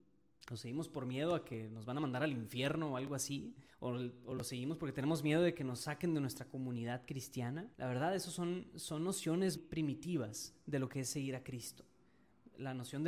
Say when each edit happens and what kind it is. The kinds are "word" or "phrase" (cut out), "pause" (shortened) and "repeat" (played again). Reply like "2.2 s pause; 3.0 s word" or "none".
3.7 s pause; 7.7 s pause; 9.6 s word